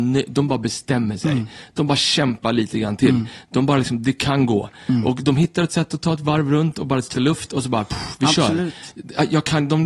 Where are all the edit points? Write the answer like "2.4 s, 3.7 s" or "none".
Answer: 7.1 s